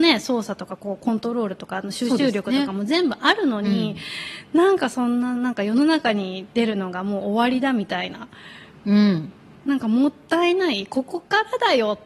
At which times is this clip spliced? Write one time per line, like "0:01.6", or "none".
none